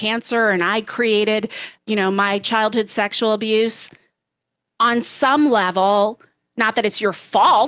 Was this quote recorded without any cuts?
yes; 0 cuts

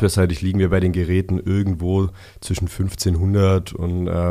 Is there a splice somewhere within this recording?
no; 0 cuts

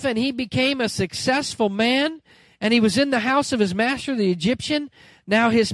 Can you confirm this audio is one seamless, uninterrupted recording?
yes; 0 cuts

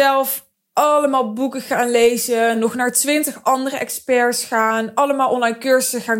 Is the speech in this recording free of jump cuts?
yes; 0 cuts

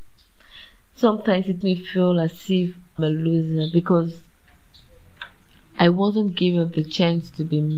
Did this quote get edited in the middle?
yes; 2 cuts; at 1.6 s, 3.0 s

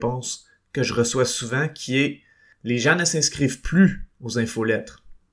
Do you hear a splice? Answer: no; 0 cuts

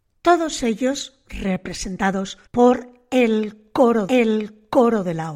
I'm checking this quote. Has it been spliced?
yes; 2 cuts; at 2.5 s, 4.1 s

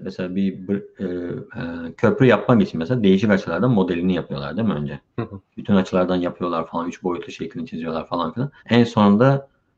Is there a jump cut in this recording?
yes; 4 cuts; at 1.5 s, 5.1 s, 5.5 s, 8.6 s

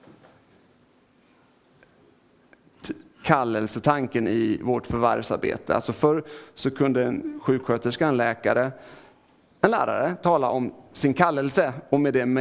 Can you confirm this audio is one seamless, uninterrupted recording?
yes; 0 cuts

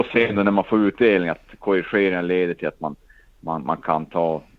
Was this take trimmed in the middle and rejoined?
no; 0 cuts

